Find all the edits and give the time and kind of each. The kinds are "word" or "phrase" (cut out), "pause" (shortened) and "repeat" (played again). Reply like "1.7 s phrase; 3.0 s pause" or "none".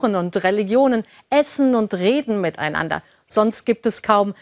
none